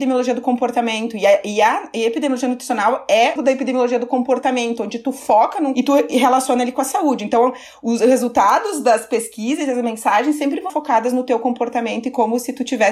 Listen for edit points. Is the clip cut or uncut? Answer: cut